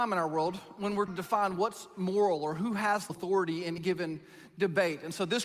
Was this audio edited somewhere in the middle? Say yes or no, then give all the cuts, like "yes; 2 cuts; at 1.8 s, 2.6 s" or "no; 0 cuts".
yes; 3 cuts; at 1.1 s, 3.1 s, 3.8 s